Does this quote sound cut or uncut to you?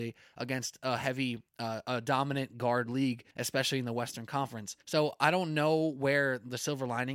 cut